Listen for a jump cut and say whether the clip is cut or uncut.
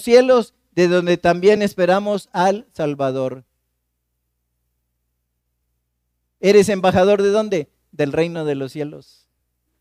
uncut